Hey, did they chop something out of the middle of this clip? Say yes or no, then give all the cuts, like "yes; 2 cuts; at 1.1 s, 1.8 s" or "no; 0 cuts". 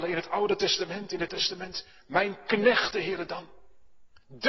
yes; 2 cuts; at 1.3 s, 2.9 s